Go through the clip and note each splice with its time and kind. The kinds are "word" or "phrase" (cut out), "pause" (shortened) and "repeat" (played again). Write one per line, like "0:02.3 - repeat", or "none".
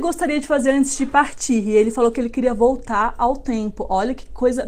none